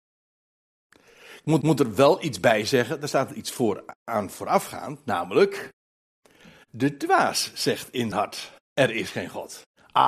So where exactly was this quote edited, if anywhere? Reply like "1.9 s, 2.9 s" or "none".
1.6 s, 4.0 s, 8.1 s, 8.6 s